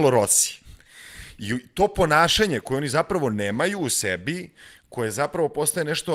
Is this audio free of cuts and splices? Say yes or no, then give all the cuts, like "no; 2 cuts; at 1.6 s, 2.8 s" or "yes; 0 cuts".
yes; 0 cuts